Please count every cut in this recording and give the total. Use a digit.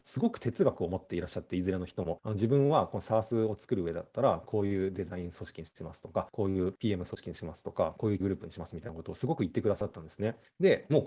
1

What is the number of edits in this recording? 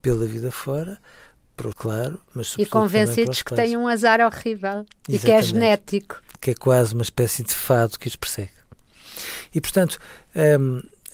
1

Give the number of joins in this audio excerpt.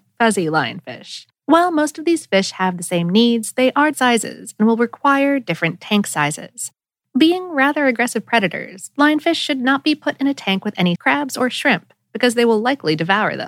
3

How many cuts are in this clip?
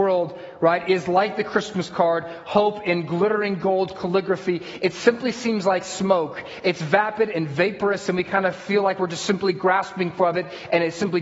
0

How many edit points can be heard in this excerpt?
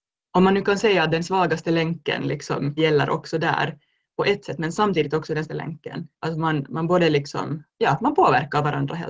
4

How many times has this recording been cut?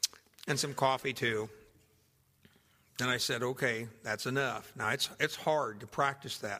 0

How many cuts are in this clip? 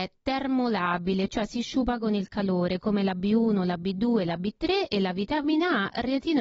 0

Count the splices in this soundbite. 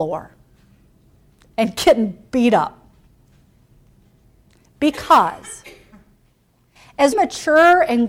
2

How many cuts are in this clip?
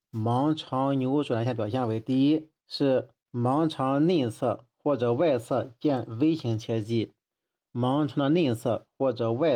1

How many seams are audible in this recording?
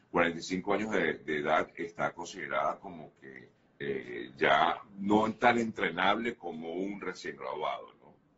2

